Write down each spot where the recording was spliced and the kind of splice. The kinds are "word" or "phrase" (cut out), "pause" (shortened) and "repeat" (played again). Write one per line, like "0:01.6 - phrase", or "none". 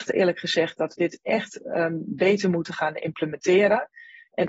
0:01.0 - word

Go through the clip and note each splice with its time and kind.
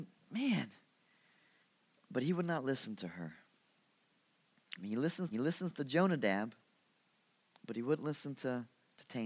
0:01.6 - pause
0:05.3 - repeat

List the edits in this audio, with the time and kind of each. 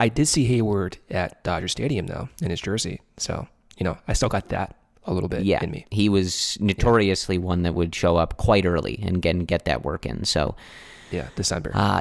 none

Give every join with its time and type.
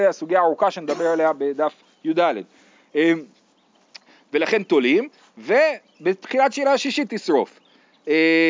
none

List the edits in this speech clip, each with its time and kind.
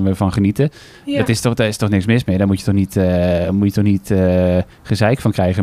0:04.7 - pause

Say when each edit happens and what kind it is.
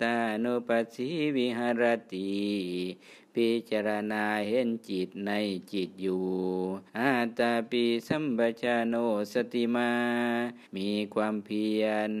0:06.9 - pause
0:10.7 - pause

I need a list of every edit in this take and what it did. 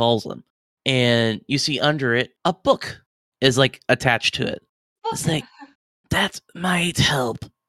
0:02.4 - pause

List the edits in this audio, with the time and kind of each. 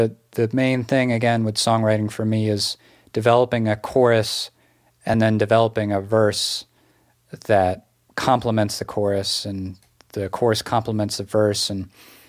none

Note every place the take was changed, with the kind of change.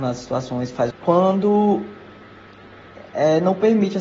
0:00.9 - phrase

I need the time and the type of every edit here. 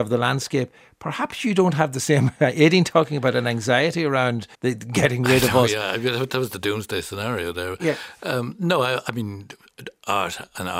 0:04.5 - pause

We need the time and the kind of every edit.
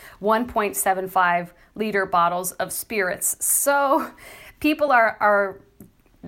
none

